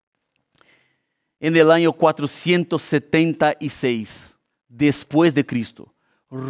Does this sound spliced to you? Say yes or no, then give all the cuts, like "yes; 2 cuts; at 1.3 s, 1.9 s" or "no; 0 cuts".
yes; 1 cut; at 4.5 s